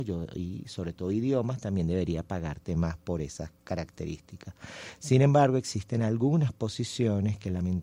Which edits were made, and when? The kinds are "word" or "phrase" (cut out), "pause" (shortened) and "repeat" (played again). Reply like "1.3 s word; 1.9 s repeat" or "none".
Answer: 3.6 s pause